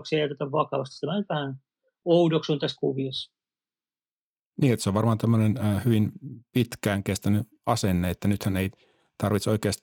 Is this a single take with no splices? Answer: yes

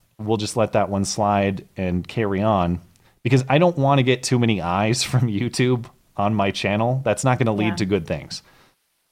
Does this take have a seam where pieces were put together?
no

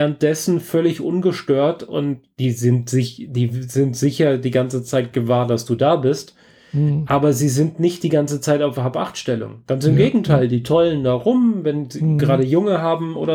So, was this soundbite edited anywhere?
no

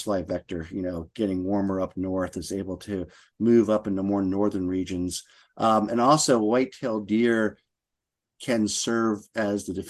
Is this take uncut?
yes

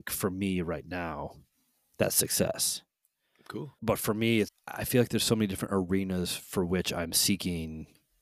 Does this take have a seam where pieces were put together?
yes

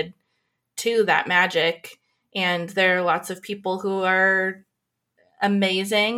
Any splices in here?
no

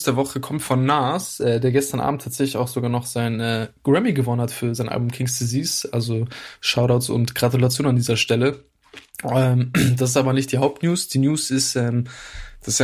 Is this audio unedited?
yes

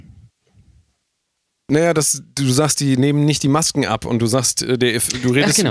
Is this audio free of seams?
yes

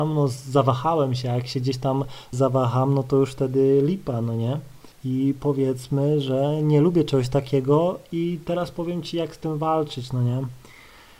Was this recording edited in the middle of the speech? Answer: yes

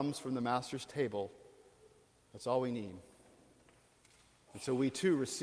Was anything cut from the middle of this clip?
no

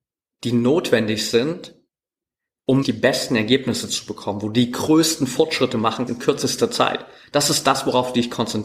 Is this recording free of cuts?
no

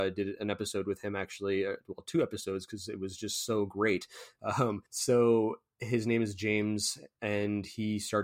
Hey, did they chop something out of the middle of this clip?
yes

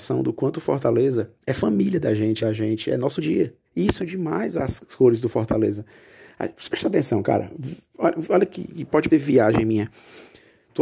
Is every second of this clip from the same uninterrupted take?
no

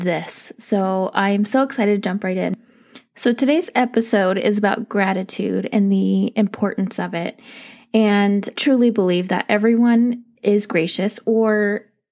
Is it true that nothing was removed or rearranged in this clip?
no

